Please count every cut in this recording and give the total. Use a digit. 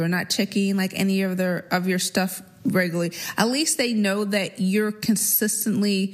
0